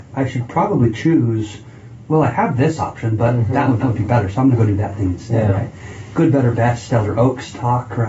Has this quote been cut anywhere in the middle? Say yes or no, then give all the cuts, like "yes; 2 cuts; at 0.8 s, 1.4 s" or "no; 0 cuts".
yes; 1 cut; at 3.8 s